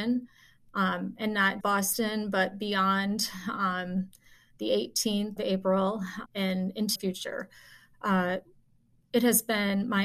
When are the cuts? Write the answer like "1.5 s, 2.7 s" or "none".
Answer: 1.6 s, 5.4 s, 6.3 s, 7.0 s

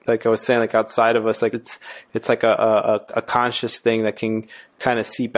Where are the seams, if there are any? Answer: 1.5 s

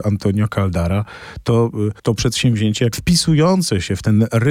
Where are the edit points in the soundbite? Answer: 2.0 s, 2.9 s

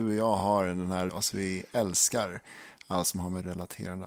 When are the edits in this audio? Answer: 1.1 s

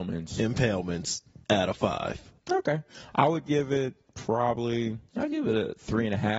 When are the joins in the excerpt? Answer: 1.4 s, 2.4 s, 5.1 s

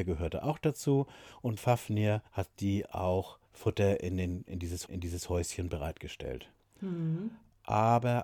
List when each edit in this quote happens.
1.6 s, 2.3 s, 3.5 s, 4.9 s

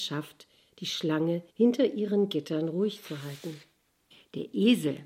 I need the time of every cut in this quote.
1.5 s, 4.1 s

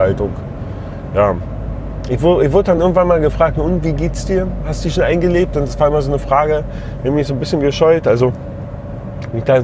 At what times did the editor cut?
none

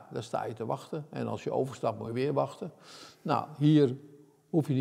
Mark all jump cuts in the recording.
none

